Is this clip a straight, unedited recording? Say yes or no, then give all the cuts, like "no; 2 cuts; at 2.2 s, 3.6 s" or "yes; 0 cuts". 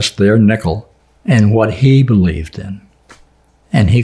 no; 1 cut; at 1.0 s